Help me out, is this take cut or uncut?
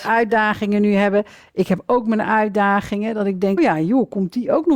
cut